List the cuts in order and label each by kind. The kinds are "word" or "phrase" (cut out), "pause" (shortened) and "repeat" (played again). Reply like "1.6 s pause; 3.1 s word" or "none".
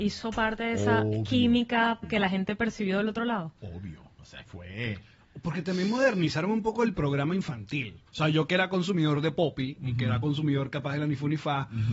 2.0 s word; 4.5 s word; 8.1 s pause